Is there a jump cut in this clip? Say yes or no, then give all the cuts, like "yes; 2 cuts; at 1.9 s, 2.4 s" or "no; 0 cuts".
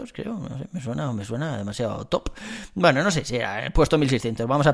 no; 0 cuts